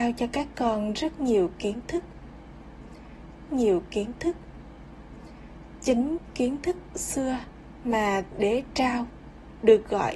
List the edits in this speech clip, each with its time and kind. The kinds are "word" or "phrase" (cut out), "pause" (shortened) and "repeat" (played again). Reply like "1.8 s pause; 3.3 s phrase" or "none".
3.5 s repeat; 6.9 s word; 8.3 s word